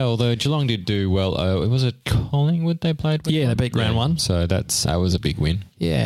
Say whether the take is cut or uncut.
cut